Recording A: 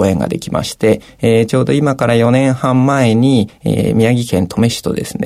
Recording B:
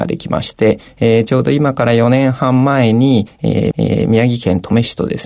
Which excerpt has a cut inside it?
B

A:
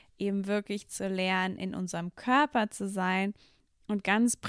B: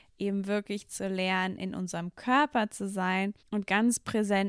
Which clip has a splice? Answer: B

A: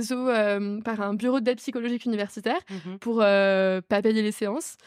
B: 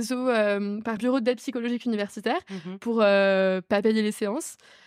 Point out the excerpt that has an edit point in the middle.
B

